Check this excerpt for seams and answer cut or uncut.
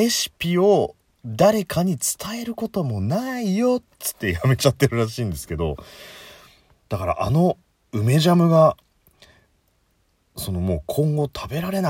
uncut